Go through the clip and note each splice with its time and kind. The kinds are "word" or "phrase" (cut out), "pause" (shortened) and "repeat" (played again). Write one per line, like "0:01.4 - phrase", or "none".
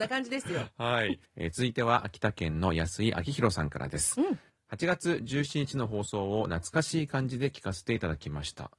none